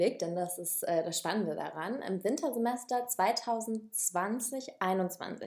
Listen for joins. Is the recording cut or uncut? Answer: uncut